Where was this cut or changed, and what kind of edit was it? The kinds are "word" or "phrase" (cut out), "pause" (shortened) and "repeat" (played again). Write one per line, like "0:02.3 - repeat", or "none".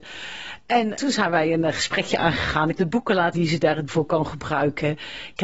0:01.0 - word
0:02.8 - word
0:03.3 - word
0:03.9 - word